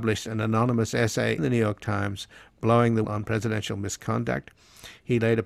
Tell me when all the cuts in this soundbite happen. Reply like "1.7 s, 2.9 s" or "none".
1.4 s, 3.0 s